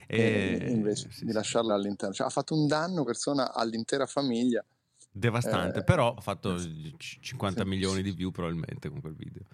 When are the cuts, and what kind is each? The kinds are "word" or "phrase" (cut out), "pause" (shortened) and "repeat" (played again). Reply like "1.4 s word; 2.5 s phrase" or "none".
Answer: 1.0 s word; 1.7 s word; 3.0 s word; 6.2 s word